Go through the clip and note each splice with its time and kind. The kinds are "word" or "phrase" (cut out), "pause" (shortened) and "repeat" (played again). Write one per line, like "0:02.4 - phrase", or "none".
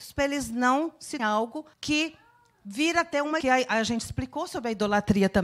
0:01.2 - word
0:01.7 - pause
0:03.4 - phrase